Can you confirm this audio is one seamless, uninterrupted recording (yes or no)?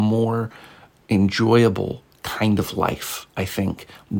yes